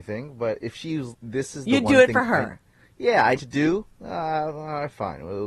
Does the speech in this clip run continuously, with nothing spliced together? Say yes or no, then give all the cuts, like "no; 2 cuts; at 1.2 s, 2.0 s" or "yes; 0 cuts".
no; 3 cuts; at 1.1 s, 3.4 s, 3.9 s